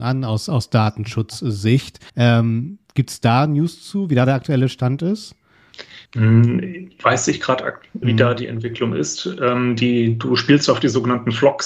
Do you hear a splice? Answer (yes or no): yes